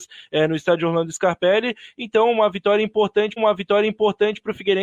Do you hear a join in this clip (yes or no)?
yes